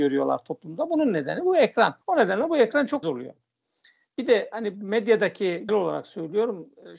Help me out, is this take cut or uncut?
cut